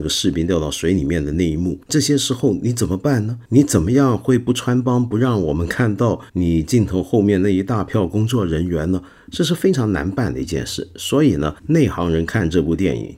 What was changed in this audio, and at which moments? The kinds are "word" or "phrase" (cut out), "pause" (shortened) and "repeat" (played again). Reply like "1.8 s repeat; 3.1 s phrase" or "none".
1.8 s pause; 3.5 s pause; 6.3 s pause; 11.6 s pause